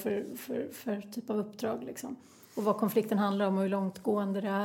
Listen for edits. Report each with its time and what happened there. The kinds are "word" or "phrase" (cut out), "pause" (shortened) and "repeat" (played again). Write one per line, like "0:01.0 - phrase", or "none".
none